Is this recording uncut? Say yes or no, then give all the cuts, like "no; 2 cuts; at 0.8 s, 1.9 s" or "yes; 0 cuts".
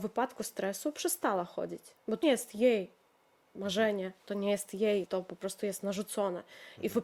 no; 2 cuts; at 2.2 s, 5.1 s